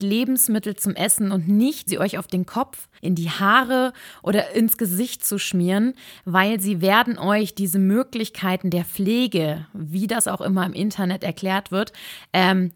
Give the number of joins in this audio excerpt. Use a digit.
2